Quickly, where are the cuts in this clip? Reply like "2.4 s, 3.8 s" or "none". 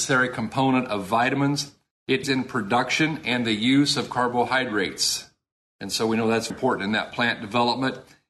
2.2 s, 6.5 s